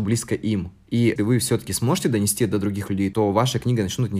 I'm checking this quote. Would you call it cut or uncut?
cut